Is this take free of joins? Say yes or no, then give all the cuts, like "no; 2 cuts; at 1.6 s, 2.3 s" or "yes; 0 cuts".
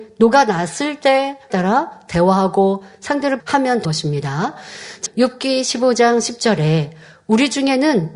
no; 4 cuts; at 1.5 s, 3.4 s, 3.8 s, 5.1 s